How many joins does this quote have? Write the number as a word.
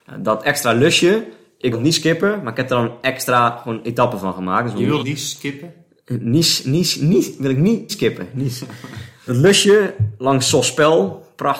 four